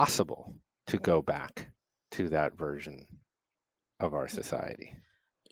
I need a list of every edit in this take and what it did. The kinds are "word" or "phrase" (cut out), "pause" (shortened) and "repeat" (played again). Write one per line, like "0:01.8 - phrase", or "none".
none